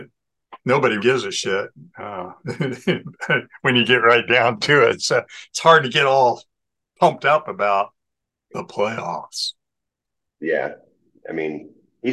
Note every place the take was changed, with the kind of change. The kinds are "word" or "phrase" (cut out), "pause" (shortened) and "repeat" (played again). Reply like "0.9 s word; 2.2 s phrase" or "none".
1.0 s word